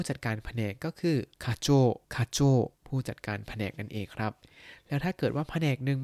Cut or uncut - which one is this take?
cut